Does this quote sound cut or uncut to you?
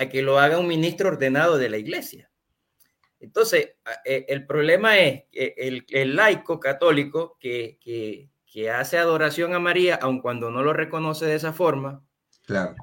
uncut